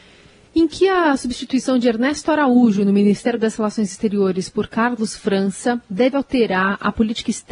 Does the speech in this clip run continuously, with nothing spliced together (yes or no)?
yes